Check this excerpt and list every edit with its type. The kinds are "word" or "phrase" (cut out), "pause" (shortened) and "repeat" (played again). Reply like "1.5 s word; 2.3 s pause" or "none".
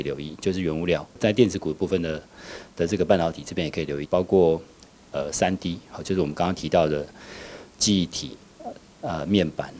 none